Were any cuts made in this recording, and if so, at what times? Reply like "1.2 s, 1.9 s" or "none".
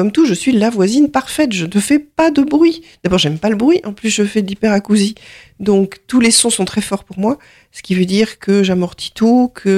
none